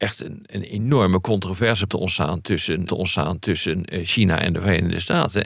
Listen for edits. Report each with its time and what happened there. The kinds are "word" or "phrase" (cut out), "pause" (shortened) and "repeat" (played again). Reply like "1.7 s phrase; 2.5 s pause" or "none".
1.9 s word; 2.9 s repeat